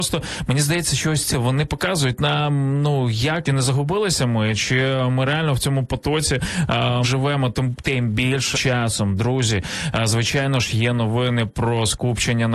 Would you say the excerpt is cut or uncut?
cut